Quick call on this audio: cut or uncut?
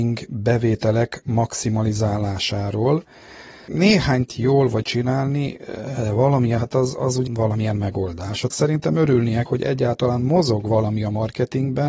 cut